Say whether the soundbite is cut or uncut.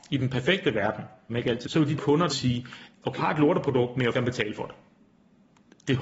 cut